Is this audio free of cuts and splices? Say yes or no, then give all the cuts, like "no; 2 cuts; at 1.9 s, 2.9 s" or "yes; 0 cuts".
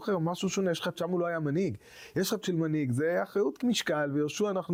no; 3 cuts; at 1.0 s, 2.4 s, 3.6 s